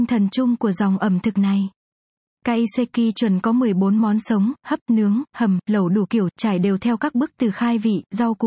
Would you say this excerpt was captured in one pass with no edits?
yes; 0 cuts

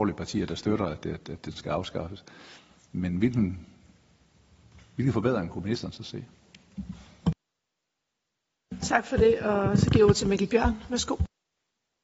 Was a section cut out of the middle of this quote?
no; 0 cuts

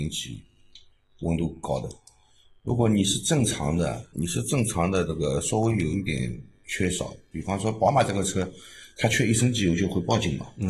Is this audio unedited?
no; 1 cut; at 4.1 s

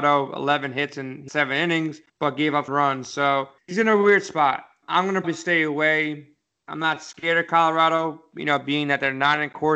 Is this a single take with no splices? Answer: no; 6 cuts; at 1.3 s, 2.1 s, 2.7 s, 3.6 s, 4.8 s, 5.2 s

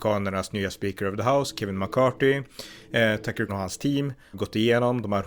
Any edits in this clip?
yes; 2 cuts; at 3.5 s, 4.3 s

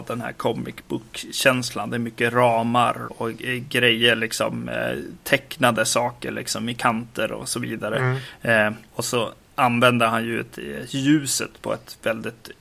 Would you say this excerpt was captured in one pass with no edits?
no; 4 cuts; at 3.1 s, 8.9 s, 9.4 s, 10.5 s

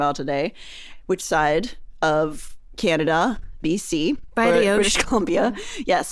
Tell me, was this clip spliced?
yes; 2 cuts; at 1.2 s, 3.6 s

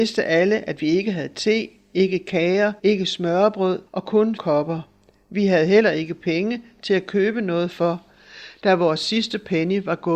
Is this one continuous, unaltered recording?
no; 3 cuts; at 2.8 s, 3.9 s, 4.4 s

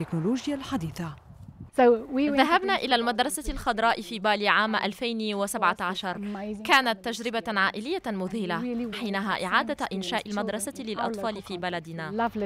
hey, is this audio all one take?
no; 2 cuts; at 8.9 s, 10.3 s

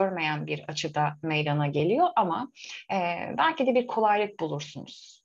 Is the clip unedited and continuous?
yes; 0 cuts

